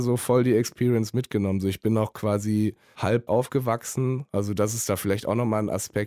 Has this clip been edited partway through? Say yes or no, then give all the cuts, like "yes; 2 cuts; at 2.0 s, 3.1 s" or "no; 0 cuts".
yes; 1 cut; at 3.3 s